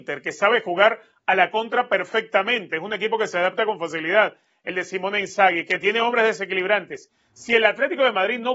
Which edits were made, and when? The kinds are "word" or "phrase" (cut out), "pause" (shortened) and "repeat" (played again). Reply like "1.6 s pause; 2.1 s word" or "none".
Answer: none